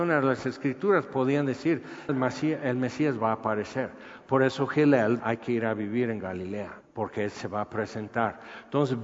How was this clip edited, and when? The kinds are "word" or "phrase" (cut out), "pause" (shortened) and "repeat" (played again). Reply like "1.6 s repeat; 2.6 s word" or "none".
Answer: 2.1 s phrase; 5.2 s word; 6.8 s pause; 7.3 s word